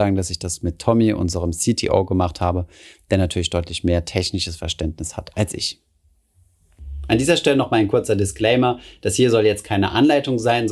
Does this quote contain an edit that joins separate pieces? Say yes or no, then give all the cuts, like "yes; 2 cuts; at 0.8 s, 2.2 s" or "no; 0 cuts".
no; 0 cuts